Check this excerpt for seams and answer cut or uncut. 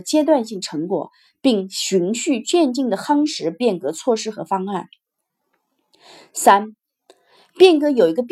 uncut